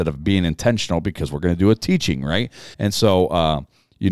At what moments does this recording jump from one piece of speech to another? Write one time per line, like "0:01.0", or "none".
0:02.7